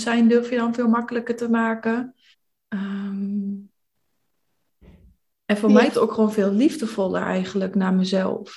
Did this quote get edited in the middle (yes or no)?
yes